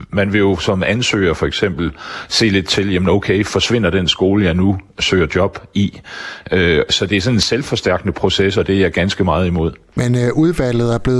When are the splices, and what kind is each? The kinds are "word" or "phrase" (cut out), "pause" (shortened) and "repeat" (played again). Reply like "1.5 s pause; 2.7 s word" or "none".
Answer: none